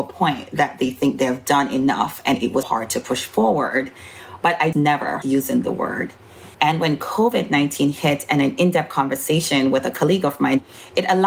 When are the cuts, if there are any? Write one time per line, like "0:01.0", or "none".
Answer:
0:02.6
0:04.7
0:05.2
0:06.5